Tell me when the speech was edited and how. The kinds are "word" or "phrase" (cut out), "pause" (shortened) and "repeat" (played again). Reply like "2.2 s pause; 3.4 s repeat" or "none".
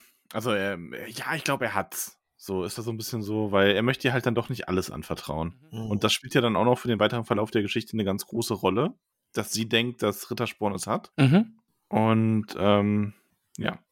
none